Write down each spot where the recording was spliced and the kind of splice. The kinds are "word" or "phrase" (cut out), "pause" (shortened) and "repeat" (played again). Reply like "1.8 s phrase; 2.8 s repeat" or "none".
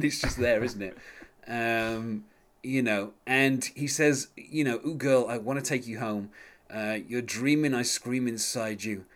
none